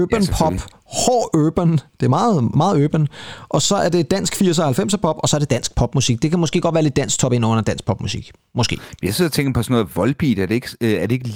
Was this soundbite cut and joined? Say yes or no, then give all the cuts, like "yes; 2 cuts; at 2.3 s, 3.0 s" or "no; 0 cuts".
no; 0 cuts